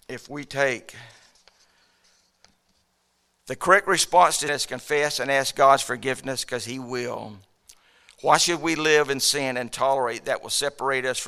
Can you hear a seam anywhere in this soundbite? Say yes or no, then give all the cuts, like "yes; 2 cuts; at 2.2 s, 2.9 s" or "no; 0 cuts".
yes; 1 cut; at 4.5 s